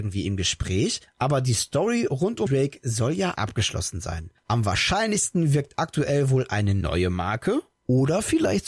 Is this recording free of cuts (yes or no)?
no